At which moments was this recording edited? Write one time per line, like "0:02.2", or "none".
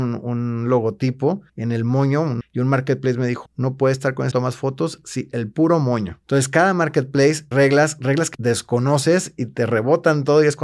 0:01.5
0:02.4
0:03.5
0:04.3
0:06.2
0:07.5
0:08.3